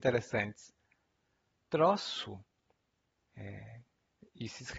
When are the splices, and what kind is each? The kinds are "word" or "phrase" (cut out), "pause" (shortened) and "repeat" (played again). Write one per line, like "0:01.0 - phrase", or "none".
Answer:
none